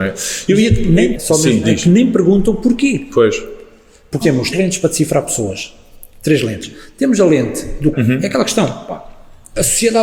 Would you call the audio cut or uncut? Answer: cut